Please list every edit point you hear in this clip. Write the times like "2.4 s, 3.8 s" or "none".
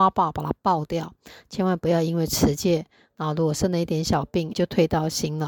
4.5 s

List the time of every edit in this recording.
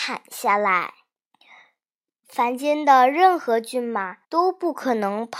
1.3 s, 4.2 s

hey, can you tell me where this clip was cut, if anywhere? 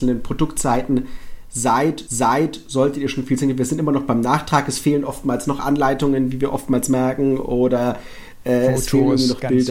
2.1 s

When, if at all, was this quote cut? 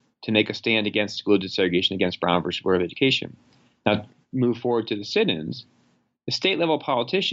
none

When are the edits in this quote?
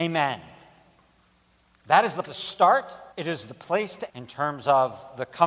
2.2 s, 3.1 s, 4.1 s

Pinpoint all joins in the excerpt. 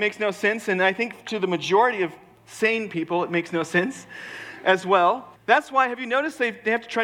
5.4 s

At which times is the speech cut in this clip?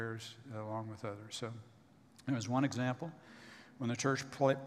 none

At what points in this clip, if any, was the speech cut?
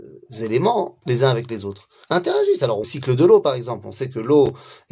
1.0 s, 2.0 s, 2.8 s

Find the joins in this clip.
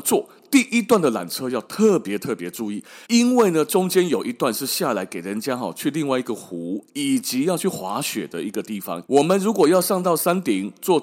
3.0 s, 9.1 s

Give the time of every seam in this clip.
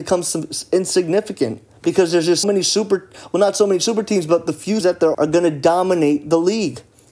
1.7 s, 2.4 s, 4.8 s, 5.1 s

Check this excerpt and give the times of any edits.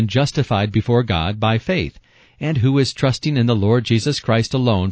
none

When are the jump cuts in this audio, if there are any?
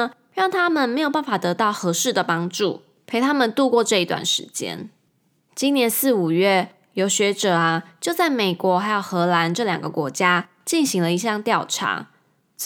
5.1 s

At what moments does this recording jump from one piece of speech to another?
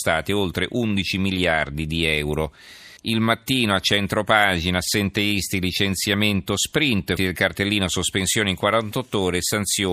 3.0 s, 7.2 s

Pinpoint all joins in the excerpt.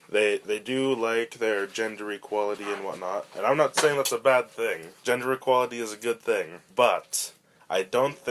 5.0 s, 6.7 s

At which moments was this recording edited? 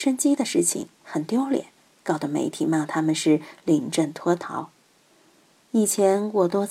none

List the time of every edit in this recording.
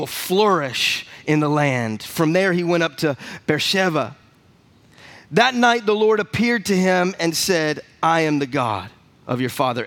none

